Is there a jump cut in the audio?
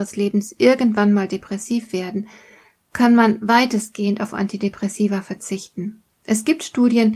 no; 0 cuts

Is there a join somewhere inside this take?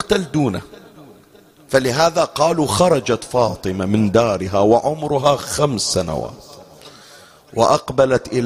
no; 0 cuts

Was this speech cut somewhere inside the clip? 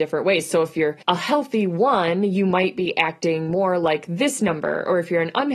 yes; 1 cut; at 1.0 s

